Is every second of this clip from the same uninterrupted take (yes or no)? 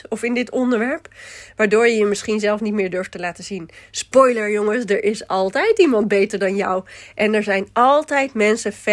yes